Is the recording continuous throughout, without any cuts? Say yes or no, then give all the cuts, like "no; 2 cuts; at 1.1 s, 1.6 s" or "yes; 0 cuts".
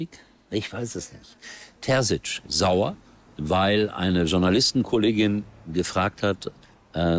yes; 0 cuts